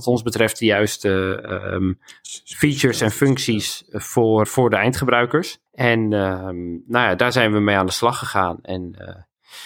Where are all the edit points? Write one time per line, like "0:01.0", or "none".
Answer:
0:04.4
0:05.7